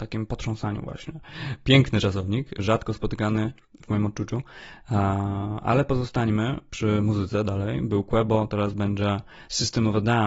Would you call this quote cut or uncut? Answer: uncut